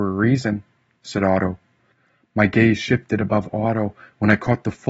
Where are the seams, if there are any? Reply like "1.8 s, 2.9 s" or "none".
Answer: none